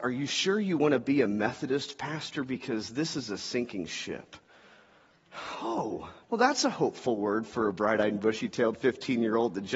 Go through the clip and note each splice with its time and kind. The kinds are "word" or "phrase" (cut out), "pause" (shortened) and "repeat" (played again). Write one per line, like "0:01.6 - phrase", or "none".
0:06.2 - pause